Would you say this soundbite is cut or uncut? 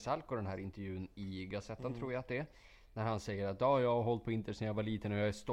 uncut